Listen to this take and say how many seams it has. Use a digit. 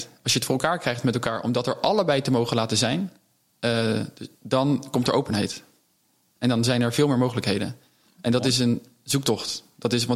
1